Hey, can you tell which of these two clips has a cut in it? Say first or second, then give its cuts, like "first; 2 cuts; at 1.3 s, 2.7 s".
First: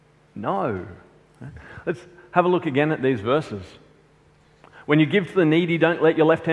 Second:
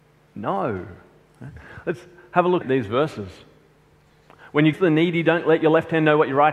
second; 2 cuts; at 2.6 s, 4.7 s